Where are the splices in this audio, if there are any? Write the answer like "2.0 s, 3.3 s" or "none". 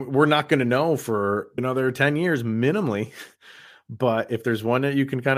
1.6 s